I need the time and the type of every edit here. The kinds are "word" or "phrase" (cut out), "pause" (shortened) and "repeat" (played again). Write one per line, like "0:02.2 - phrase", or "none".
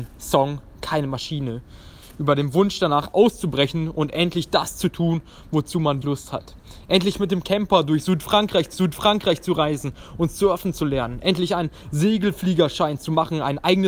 0:03.1 - word
0:06.0 - word
0:08.7 - repeat